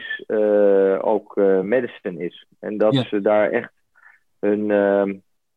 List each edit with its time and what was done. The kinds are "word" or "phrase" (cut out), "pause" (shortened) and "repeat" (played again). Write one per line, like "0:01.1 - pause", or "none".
none